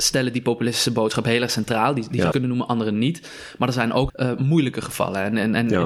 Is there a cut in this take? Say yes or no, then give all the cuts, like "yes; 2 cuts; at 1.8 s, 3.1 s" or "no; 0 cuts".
yes; 2 cuts; at 2.3 s, 4.1 s